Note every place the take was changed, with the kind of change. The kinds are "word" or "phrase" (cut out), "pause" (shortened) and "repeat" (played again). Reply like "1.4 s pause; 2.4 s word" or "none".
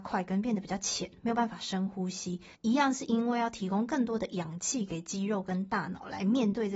2.5 s pause